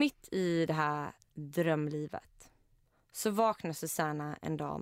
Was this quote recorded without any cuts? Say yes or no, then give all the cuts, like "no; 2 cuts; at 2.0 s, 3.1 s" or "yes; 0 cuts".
yes; 0 cuts